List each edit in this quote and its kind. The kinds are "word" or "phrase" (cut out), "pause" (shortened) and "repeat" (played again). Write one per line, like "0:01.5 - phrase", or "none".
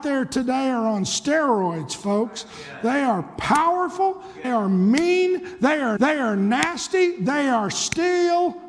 0:04.4 - word
0:06.0 - repeat